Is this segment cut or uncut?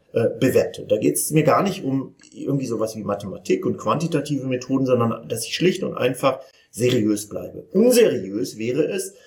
uncut